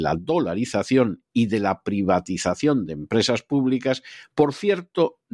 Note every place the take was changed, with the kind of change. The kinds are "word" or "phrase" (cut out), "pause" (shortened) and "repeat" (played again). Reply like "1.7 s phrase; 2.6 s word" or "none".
none